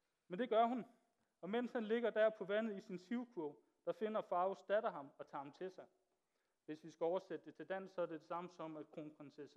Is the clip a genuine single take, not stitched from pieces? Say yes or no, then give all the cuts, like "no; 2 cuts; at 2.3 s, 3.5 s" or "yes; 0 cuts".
yes; 0 cuts